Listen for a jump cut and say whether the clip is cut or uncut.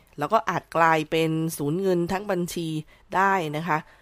uncut